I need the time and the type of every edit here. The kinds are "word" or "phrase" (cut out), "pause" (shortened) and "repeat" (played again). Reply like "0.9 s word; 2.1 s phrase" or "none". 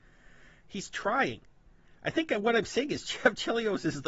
none